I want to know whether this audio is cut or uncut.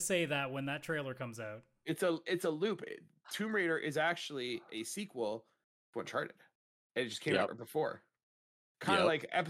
uncut